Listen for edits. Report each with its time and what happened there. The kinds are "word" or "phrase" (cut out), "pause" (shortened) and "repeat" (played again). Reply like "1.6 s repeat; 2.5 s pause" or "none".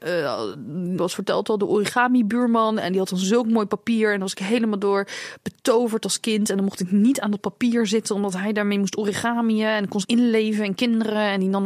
1.0 s phrase; 10.0 s phrase